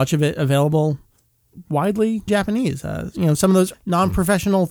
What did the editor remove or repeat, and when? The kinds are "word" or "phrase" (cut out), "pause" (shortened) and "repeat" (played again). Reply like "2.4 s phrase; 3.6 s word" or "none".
2.3 s word; 3.7 s word